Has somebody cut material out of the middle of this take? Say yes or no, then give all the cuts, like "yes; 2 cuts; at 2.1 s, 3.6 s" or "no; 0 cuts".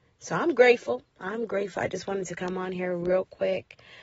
no; 0 cuts